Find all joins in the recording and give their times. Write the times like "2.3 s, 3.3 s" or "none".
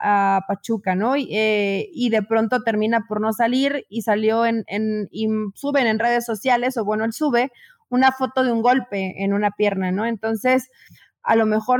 none